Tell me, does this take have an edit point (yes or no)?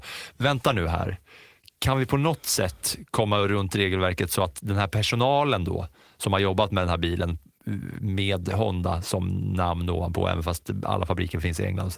no